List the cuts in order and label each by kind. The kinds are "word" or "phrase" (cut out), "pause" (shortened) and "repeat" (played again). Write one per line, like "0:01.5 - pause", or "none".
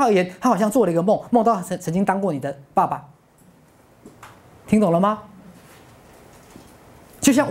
none